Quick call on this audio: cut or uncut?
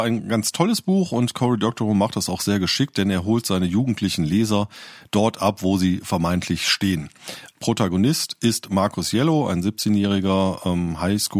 uncut